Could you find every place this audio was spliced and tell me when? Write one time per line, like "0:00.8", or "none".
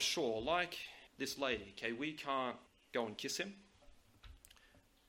0:01.1
0:02.7